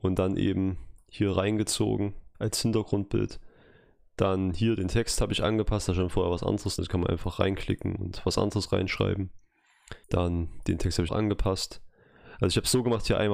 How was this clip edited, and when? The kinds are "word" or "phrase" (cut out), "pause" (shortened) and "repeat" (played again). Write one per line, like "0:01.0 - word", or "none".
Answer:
0:02.3 - pause
0:06.8 - word
0:10.0 - pause
0:11.1 - phrase